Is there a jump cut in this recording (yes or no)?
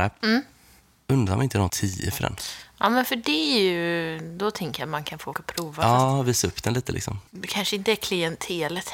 yes